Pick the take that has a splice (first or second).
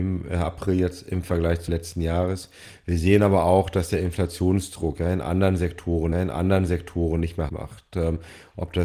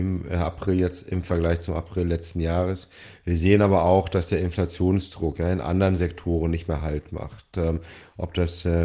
first